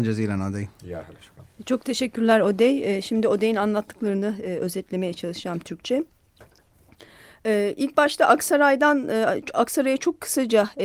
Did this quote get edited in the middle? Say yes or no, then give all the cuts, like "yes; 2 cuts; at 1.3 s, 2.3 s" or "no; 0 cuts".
no; 0 cuts